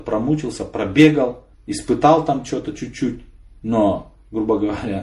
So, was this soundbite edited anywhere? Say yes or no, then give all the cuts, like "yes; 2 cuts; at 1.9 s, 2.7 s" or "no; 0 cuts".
yes; 1 cut; at 1.5 s